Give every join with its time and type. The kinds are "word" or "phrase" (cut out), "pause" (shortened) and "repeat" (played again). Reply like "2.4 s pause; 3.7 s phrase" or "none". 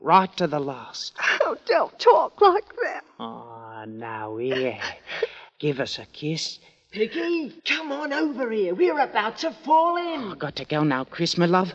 5.5 s pause; 7.6 s pause